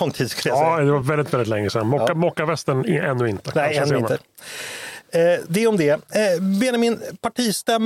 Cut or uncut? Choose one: uncut